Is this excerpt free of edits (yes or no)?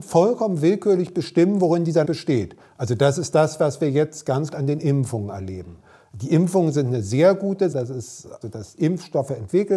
no